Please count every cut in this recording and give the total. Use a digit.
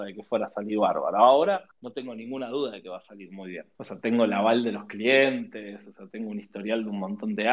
2